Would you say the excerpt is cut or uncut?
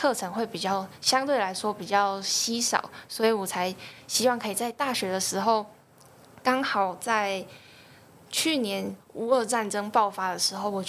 uncut